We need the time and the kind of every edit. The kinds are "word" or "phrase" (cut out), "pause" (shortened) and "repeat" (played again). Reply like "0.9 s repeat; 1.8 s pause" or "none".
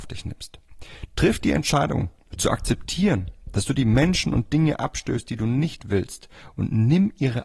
none